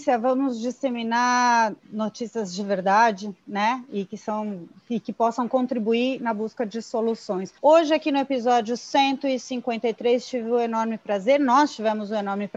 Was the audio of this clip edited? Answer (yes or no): yes